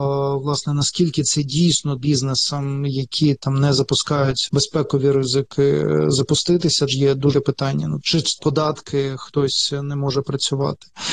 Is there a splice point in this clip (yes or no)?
yes